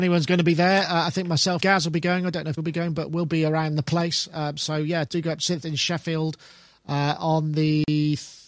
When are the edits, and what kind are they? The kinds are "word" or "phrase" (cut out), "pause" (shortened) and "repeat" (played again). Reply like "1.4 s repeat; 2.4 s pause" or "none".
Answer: 1.6 s word; 2.6 s word; 5.1 s word; 5.6 s word